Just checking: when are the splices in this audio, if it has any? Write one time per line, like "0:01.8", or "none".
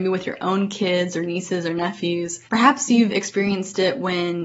0:02.4